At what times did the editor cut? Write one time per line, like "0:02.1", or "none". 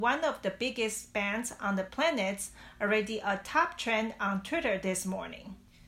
none